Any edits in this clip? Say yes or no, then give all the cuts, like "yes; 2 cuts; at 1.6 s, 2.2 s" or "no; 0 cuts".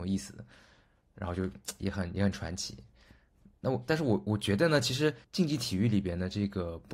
yes; 1 cut; at 5.2 s